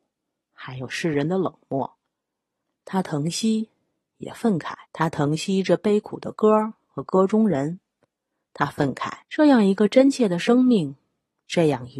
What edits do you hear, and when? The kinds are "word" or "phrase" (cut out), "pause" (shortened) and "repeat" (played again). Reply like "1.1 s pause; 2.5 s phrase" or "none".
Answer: 4.8 s pause; 9.2 s pause